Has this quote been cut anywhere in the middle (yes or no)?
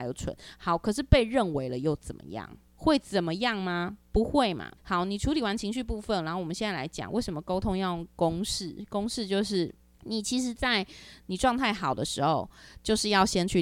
yes